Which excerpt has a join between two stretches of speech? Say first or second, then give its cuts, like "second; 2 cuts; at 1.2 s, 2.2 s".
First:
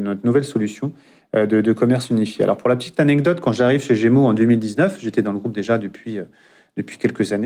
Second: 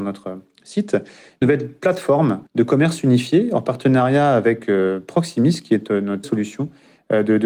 second; 3 cuts; at 1.4 s, 2.5 s, 6.2 s